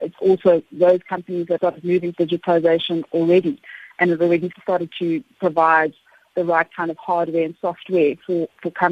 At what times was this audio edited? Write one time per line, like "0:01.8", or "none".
0:01.6
0:02.1
0:04.5